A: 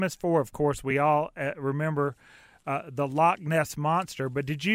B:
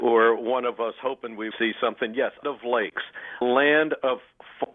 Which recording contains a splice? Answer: B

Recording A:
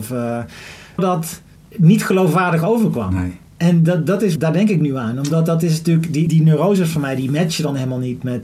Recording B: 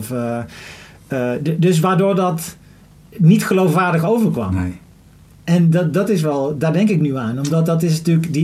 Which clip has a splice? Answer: A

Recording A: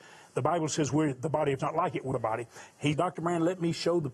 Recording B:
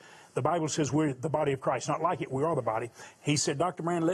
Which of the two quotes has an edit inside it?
A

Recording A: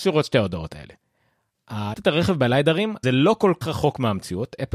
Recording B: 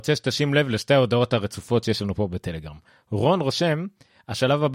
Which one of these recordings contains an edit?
A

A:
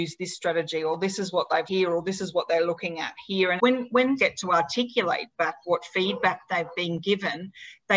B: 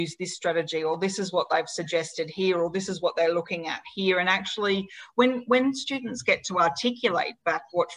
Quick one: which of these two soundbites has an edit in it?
A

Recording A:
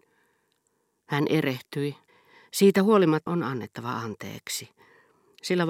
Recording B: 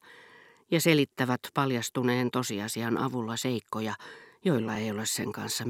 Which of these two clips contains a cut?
A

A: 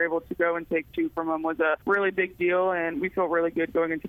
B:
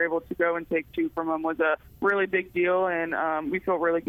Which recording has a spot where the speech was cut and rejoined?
A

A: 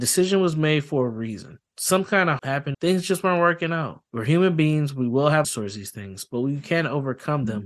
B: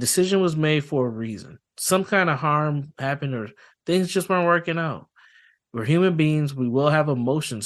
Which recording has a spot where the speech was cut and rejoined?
A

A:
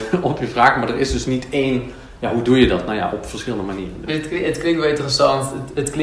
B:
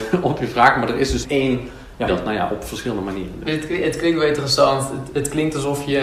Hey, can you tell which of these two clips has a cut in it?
B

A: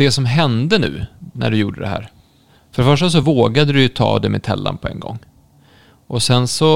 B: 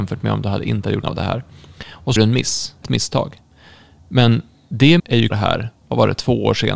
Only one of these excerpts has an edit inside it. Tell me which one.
B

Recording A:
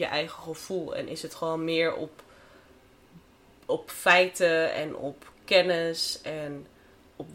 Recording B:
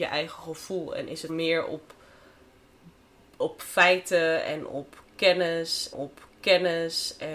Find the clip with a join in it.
B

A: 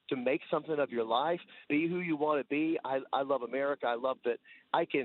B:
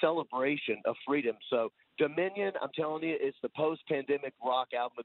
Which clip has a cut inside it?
A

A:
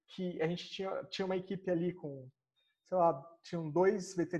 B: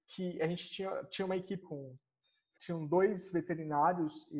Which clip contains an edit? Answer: B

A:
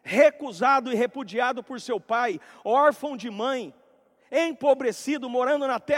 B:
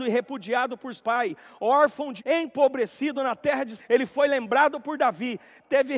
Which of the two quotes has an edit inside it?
B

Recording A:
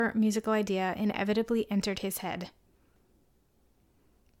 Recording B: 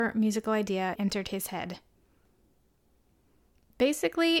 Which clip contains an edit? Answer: B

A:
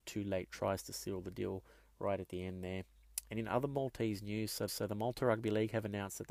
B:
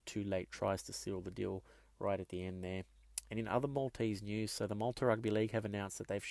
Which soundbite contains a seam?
A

